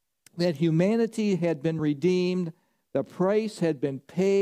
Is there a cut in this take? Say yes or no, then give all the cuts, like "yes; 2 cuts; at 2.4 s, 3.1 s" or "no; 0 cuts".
no; 0 cuts